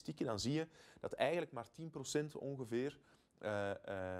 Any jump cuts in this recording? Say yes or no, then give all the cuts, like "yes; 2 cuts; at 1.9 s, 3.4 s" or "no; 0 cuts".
no; 0 cuts